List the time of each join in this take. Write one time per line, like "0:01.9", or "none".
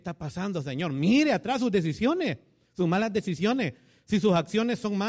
none